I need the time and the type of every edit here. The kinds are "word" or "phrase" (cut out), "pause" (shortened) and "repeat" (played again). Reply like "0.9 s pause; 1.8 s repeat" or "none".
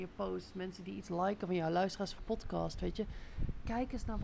2.2 s word